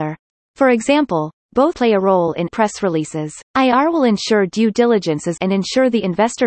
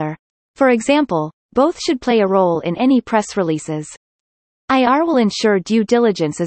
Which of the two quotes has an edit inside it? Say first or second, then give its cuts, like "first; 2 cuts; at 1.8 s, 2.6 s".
first; 4 cuts; at 1.7 s, 2.5 s, 3.5 s, 5.4 s